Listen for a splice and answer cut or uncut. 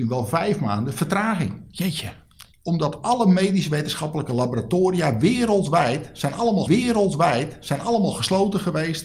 cut